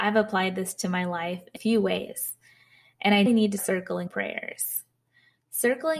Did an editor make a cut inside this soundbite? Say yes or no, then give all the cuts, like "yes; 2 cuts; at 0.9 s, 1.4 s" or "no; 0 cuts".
yes; 4 cuts; at 1.6 s, 3.3 s, 3.6 s, 4.1 s